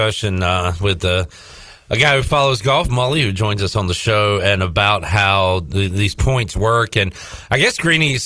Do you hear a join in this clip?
no; 0 cuts

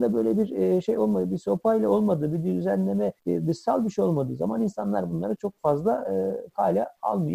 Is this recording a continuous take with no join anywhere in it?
no; 2 cuts; at 3.2 s, 5.4 s

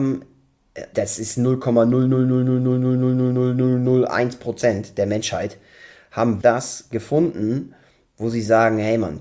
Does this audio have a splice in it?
yes; 2 cuts; at 0.9 s, 6.4 s

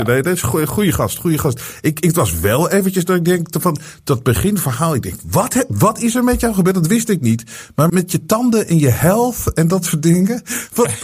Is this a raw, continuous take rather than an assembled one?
no; 1 cut; at 7.9 s

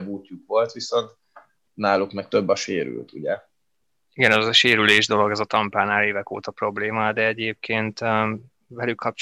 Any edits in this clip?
yes; 1 cut; at 3.8 s

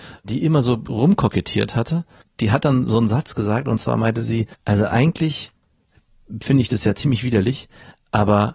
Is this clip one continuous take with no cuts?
no; 2 cuts; at 2.2 s, 4.5 s

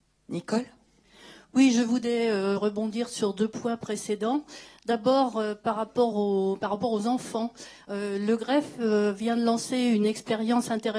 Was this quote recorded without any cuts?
yes; 0 cuts

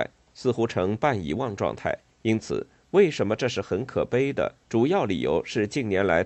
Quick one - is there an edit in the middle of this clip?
yes; 2 cuts; at 2.1 s, 4.6 s

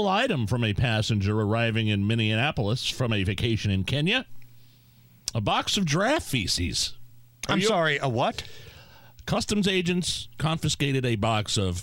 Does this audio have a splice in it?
no; 0 cuts

